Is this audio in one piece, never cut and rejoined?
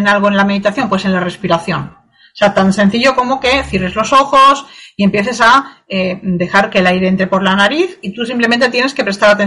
yes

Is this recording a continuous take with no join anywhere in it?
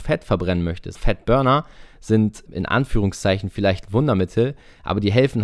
no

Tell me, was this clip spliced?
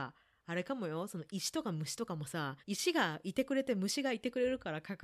yes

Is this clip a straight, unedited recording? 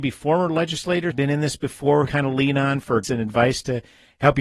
no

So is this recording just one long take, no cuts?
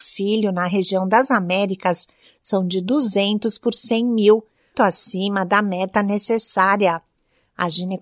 no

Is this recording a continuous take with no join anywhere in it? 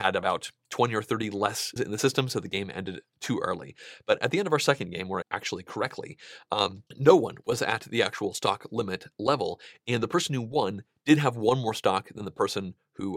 no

